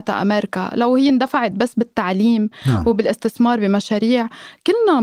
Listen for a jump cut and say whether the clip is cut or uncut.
uncut